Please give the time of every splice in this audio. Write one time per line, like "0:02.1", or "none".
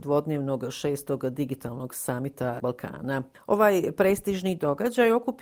0:02.6